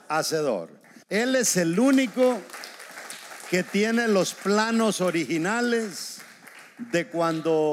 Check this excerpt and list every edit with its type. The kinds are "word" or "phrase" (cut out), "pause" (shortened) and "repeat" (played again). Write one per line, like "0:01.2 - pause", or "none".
0:01.0 - pause

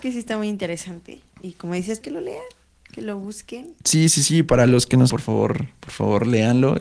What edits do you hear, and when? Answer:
0:02.0 - word
0:05.1 - word

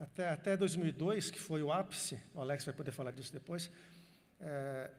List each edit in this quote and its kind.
none

